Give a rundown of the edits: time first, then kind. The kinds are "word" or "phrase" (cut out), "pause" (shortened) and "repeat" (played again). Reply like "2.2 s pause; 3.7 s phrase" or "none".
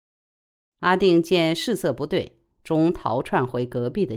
2.5 s phrase